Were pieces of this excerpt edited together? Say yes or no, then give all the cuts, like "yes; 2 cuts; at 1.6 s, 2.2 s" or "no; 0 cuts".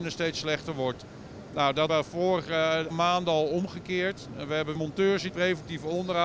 yes; 4 cuts; at 1.9 s, 2.9 s, 4.8 s, 5.3 s